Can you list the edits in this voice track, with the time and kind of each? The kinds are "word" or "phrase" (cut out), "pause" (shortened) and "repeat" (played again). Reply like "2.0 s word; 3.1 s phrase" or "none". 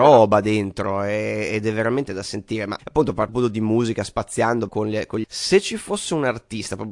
2.1 s word; 2.8 s word; 3.3 s word; 4.7 s word; 5.2 s word